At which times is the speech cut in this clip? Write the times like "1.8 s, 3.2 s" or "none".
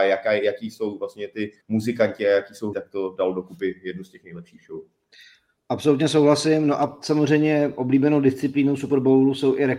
1.6 s, 2.7 s